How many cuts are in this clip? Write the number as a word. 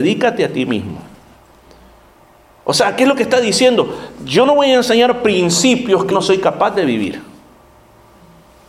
one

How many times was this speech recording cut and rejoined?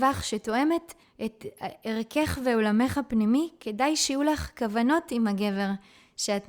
one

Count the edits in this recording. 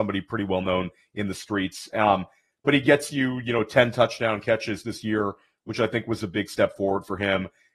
zero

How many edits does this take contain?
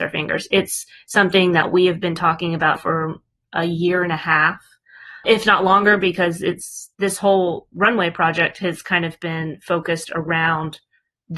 three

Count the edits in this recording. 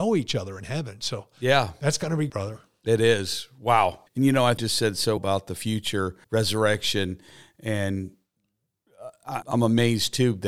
six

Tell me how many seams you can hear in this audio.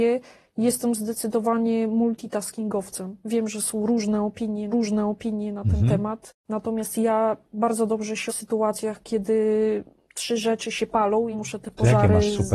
four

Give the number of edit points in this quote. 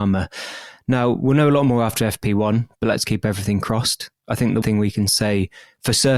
one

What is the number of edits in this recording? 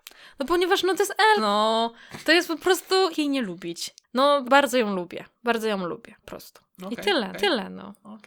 seven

